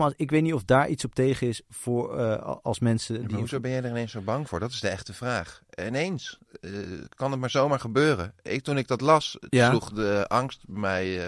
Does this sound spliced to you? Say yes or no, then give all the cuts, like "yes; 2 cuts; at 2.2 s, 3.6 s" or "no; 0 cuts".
no; 0 cuts